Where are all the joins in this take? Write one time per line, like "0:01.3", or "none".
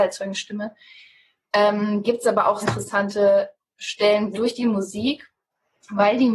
0:02.0
0:02.6
0:04.3

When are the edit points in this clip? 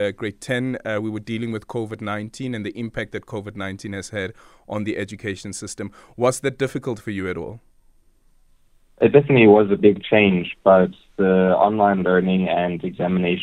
none

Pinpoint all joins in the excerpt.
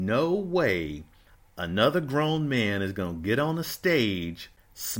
none

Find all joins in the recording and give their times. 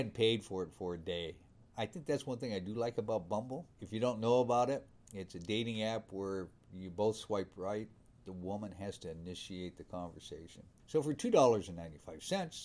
none

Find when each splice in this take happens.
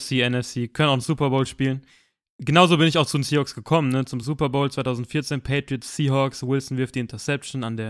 none

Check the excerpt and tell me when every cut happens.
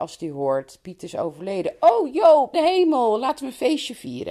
0:02.5

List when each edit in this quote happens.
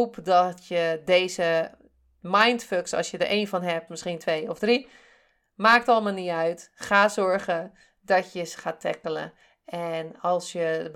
0:03.9

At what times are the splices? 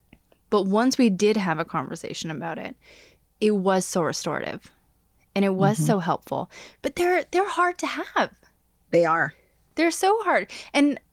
none

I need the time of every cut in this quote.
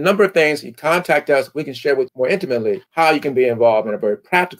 0:02.1
0:02.9

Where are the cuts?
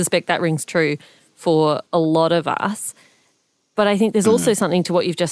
0:01.9

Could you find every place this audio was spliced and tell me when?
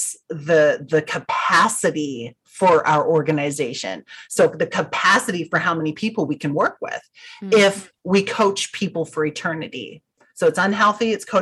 none

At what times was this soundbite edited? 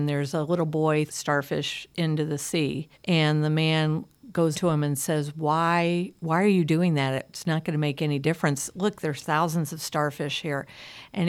0:01.1
0:02.9
0:04.5

